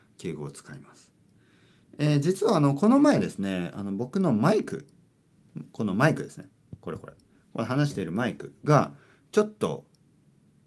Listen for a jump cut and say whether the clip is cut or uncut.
uncut